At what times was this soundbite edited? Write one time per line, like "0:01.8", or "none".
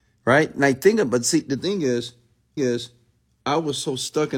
0:02.6